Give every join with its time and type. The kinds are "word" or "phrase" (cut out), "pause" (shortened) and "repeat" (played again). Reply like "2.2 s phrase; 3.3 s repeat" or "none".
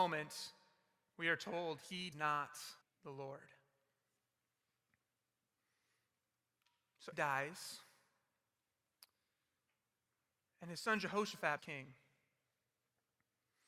2.1 s word; 2.8 s word; 7.1 s word; 11.6 s word